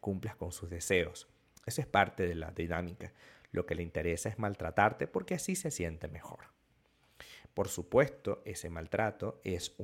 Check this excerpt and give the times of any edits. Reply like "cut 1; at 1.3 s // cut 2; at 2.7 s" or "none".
none